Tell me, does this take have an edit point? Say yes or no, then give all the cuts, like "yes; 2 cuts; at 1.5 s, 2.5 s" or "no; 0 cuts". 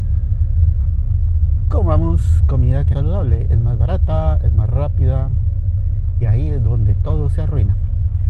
yes; 2 cuts; at 2.9 s, 6.2 s